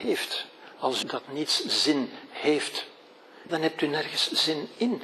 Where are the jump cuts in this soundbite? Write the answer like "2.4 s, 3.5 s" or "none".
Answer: 1.0 s, 3.5 s